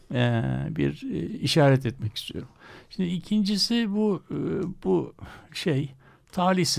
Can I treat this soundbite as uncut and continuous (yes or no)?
yes